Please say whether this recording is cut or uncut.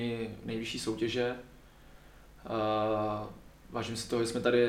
uncut